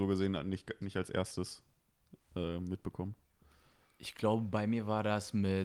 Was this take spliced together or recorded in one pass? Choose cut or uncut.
uncut